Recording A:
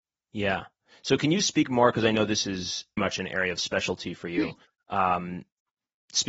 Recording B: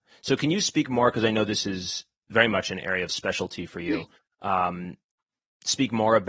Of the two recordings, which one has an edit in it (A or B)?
A